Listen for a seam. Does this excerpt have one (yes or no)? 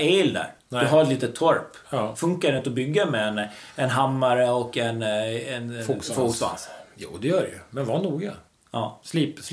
no